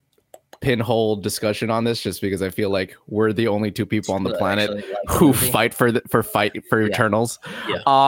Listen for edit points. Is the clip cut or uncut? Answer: uncut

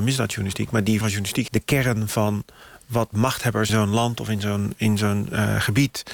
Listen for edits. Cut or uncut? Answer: cut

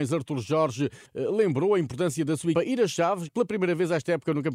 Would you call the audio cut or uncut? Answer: cut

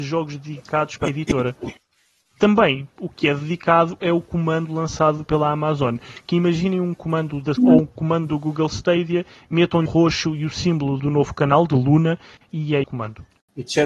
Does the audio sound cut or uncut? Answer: cut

